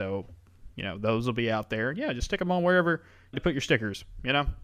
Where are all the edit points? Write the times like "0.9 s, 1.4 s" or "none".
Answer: 3.3 s